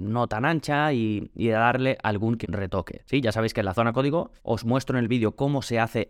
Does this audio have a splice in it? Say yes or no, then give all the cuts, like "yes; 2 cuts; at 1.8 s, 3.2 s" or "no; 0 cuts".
yes; 2 cuts; at 2.4 s, 4.4 s